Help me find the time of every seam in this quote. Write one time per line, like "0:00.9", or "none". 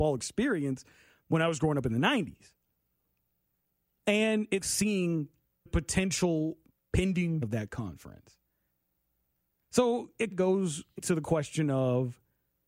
0:04.6
0:05.7
0:07.4
0:10.3
0:11.0